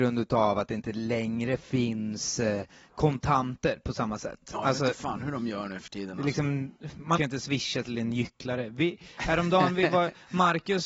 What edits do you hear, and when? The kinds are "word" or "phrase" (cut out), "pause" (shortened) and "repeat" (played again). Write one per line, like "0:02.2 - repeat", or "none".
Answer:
0:07.2 - word